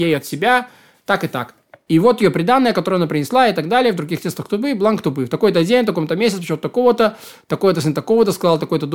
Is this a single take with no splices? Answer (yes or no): yes